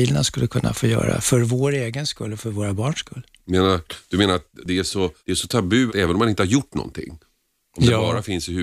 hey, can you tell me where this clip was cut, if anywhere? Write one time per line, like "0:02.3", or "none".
0:05.2
0:05.9